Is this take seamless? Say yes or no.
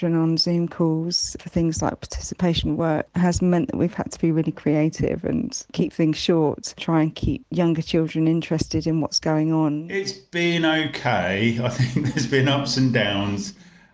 yes